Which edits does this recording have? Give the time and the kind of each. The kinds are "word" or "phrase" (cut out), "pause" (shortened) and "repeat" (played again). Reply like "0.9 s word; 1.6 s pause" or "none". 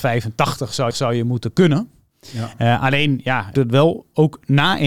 0.9 s repeat; 3.5 s phrase